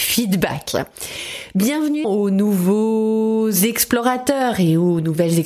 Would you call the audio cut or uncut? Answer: cut